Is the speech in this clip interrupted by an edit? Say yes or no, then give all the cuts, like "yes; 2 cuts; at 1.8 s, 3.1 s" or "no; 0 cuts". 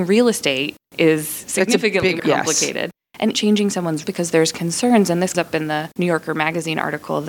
yes; 4 cuts; at 2.2 s, 3.3 s, 4.0 s, 5.3 s